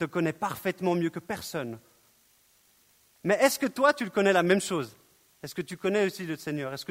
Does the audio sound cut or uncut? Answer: uncut